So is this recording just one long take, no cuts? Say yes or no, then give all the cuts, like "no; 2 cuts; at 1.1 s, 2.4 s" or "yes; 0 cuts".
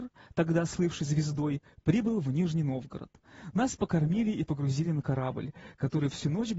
yes; 0 cuts